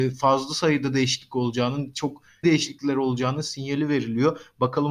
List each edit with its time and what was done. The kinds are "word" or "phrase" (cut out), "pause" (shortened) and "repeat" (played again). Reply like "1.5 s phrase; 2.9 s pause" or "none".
2.4 s word